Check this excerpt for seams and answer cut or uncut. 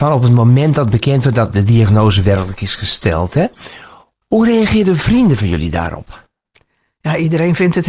uncut